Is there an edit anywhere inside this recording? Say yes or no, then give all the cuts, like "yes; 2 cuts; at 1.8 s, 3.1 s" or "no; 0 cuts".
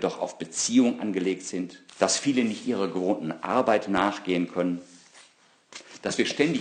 yes; 1 cut; at 1.9 s